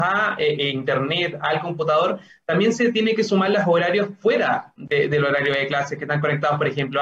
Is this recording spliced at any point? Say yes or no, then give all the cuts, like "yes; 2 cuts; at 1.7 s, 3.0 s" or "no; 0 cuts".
no; 0 cuts